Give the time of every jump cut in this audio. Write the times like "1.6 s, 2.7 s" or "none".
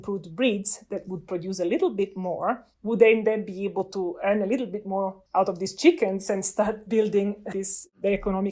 2.7 s, 5.3 s, 7.5 s